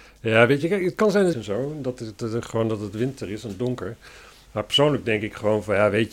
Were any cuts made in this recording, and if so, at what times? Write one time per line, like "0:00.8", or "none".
0:01.3